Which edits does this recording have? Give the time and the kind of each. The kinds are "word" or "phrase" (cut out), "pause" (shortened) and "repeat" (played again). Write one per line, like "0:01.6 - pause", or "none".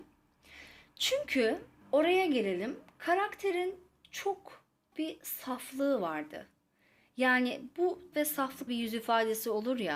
0:01.8 - word
0:04.9 - word
0:08.1 - word
0:08.7 - word